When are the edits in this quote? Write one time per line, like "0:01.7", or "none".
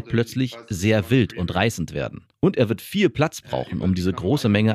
0:02.3